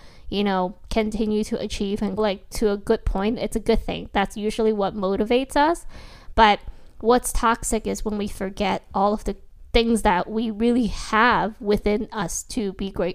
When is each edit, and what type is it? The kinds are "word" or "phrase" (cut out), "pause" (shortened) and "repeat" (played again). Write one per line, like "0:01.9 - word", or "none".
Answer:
0:02.2 - word

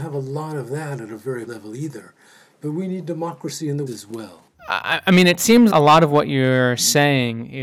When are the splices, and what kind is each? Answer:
0:01.5 - word
0:03.9 - word
0:05.7 - word

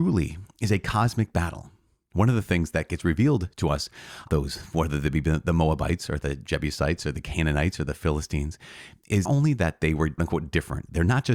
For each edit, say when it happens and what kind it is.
0:04.3 - word
0:09.3 - word
0:10.2 - word

